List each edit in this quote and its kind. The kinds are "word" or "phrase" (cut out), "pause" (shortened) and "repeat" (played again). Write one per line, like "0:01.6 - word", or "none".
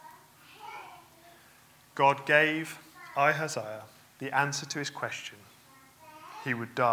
none